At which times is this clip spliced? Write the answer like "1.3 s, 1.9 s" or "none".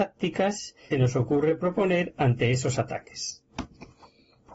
0.9 s